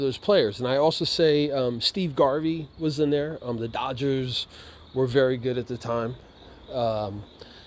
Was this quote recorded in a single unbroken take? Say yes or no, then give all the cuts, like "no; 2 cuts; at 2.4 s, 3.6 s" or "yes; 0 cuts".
yes; 0 cuts